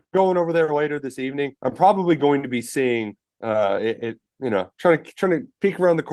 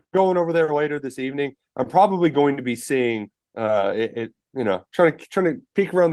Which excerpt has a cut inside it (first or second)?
first